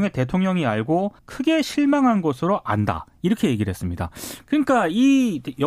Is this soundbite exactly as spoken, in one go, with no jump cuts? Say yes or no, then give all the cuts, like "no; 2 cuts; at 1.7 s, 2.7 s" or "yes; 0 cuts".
no; 1 cut; at 1.2 s